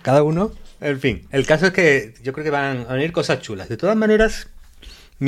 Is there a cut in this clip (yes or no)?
no